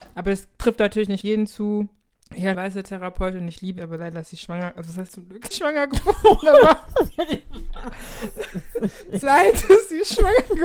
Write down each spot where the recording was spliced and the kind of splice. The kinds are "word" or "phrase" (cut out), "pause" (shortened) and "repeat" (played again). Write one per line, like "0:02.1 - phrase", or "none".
0:01.2 - word
0:02.5 - word
0:03.8 - word
0:05.1 - word
0:05.5 - word
0:09.2 - word